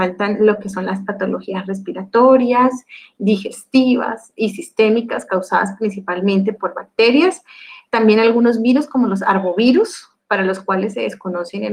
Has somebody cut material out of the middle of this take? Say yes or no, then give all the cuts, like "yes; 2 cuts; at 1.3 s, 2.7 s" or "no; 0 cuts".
no; 0 cuts